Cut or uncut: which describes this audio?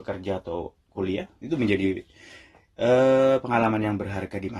uncut